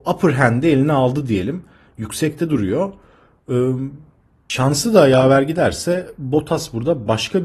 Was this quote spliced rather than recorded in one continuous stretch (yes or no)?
no